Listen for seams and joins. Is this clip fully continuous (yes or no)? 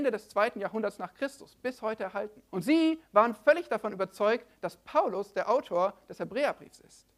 no